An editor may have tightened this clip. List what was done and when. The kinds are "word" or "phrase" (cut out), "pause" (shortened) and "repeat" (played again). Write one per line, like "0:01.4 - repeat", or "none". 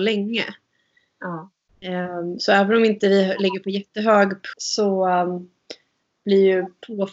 0:04.5 - word